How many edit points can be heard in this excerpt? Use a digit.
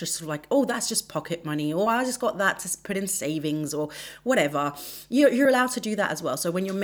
0